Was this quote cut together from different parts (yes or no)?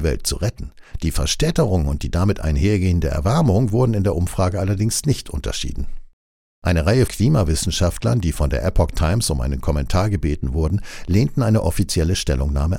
yes